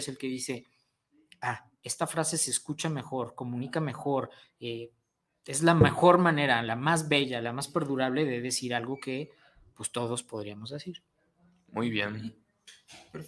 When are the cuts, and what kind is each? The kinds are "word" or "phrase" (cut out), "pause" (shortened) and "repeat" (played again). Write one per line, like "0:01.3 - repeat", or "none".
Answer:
none